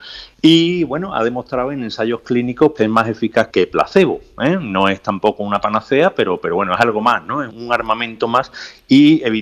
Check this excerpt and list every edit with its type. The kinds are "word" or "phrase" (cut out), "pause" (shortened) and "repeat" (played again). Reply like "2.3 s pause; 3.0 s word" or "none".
2.8 s word; 3.5 s word; 7.5 s word